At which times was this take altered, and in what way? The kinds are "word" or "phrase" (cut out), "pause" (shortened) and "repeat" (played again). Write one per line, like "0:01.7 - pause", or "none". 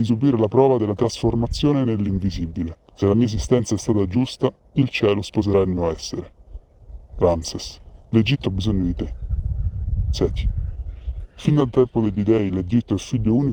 0:02.8 - pause